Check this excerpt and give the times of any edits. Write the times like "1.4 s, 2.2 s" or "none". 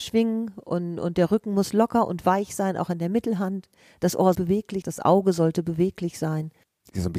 4.3 s, 4.8 s